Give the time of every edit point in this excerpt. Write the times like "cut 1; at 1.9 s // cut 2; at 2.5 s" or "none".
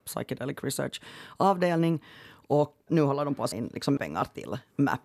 cut 1; at 2.9 s // cut 2; at 3.5 s // cut 3; at 4.0 s